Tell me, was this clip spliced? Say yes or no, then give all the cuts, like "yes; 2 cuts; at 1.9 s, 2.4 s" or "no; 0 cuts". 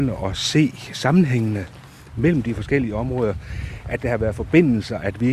no; 0 cuts